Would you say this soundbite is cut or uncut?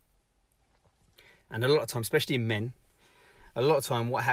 uncut